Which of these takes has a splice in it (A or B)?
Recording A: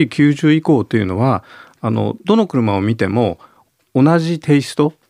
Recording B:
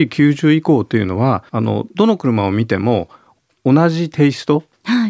B